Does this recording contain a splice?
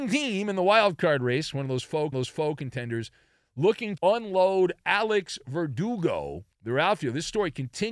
yes; 3 cuts; at 2.1 s, 4.0 s, 6.5 s

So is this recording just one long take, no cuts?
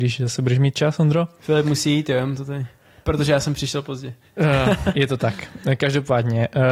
yes; 0 cuts

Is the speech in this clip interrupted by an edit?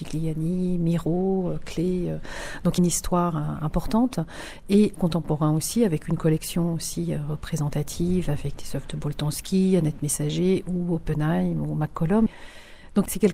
yes; 2 cuts; at 2.8 s, 5.0 s

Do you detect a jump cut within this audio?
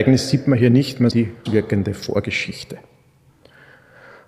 yes; 2 cuts; at 1.1 s, 1.5 s

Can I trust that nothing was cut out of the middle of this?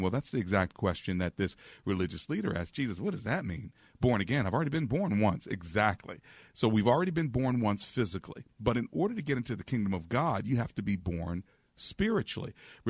yes; 0 cuts

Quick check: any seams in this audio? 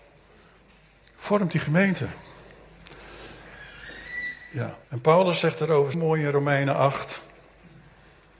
yes; 2 cuts; at 4.8 s, 5.9 s

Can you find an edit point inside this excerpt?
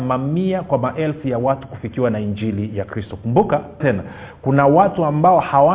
yes; 1 cut; at 3.8 s

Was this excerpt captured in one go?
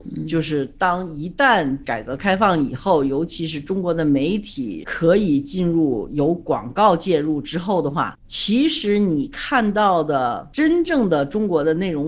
no; 1 cut; at 8.2 s

